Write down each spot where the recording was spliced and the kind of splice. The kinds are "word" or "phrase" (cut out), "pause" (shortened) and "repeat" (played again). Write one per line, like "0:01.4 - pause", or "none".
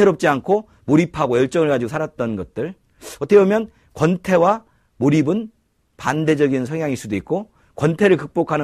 none